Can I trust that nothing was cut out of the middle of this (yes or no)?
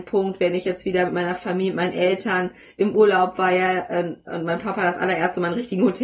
yes